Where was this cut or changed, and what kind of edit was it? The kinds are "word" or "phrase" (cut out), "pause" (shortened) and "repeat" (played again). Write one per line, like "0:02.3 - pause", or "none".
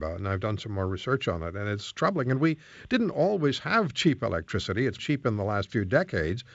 0:05.0 - word